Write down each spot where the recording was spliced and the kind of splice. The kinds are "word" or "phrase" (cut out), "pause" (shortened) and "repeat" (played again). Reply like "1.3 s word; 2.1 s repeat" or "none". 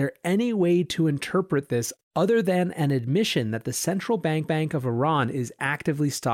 4.4 s repeat